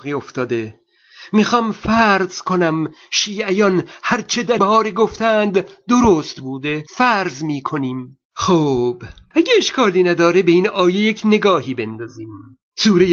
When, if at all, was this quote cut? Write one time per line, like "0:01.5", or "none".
0:04.6
0:06.9
0:08.2